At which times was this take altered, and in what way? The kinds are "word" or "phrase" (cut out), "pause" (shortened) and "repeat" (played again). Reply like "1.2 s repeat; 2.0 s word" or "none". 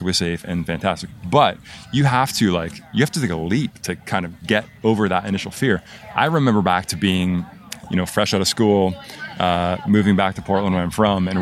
none